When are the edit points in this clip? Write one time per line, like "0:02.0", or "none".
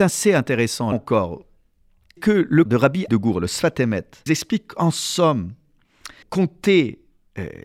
0:00.9
0:02.2
0:02.7
0:03.1
0:04.3
0:06.2

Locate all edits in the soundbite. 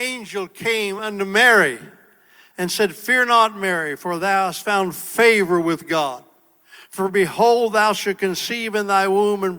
none

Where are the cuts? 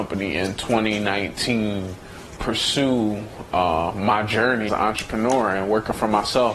0:02.4
0:04.7

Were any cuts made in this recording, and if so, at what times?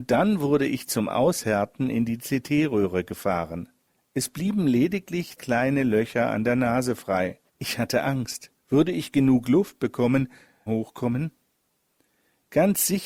0:03.9
0:05.4
0:07.5
0:08.6
0:10.7

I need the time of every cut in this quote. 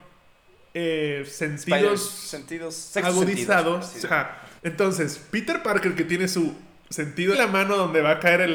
0:04.0
0:04.6
0:07.3

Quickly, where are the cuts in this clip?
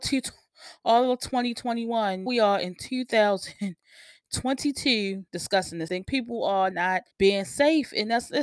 0:02.3
0:05.3
0:05.9
0:06.7
0:07.1

